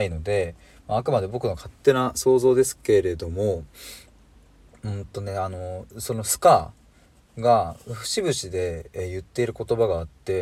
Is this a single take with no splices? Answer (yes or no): yes